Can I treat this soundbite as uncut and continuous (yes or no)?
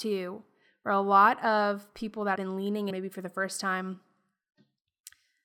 no